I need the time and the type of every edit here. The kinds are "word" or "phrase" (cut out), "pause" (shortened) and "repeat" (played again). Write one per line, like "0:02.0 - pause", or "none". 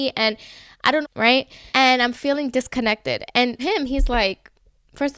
0:01.0 - phrase
0:01.7 - pause
0:03.6 - word

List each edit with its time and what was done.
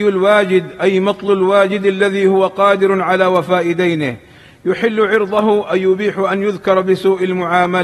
none

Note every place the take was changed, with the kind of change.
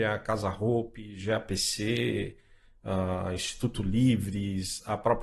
none

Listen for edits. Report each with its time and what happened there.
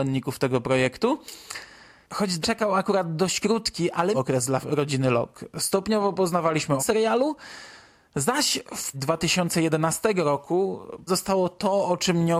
0:02.4 - word
0:04.1 - word
0:04.6 - word
0:06.8 - word
0:08.9 - word
0:11.1 - word

